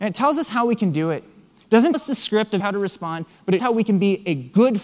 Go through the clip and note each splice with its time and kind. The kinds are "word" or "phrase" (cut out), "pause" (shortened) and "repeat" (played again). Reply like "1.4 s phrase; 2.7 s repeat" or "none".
1.9 s word; 2.6 s word; 3.6 s word